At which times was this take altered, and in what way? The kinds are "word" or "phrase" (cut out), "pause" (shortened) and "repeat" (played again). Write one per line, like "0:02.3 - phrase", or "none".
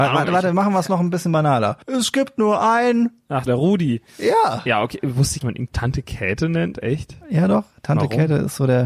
0:01.8 - pause
0:03.5 - word
0:05.4 - phrase